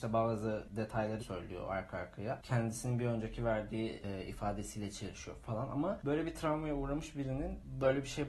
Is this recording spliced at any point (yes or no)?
yes